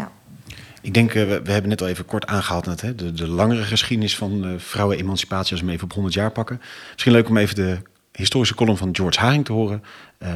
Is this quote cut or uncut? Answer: uncut